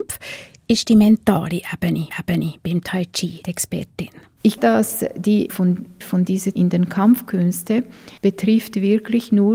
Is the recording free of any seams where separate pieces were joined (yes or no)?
no